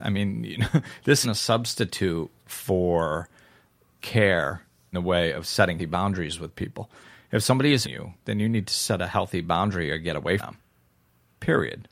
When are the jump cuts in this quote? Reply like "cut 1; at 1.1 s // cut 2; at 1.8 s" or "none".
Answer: cut 1; at 1.2 s // cut 2; at 4.0 s // cut 3; at 4.9 s // cut 4; at 5.8 s // cut 5; at 7.8 s // cut 6; at 10.4 s